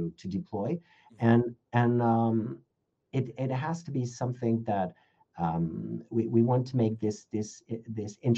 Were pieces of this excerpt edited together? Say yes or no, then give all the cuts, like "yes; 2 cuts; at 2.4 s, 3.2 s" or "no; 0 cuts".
no; 0 cuts